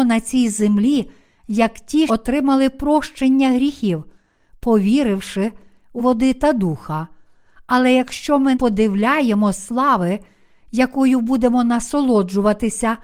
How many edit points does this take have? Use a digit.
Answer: 3